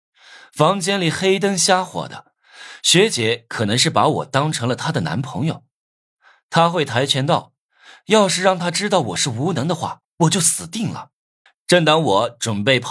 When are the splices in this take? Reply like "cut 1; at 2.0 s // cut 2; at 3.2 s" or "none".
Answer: cut 1; at 11.5 s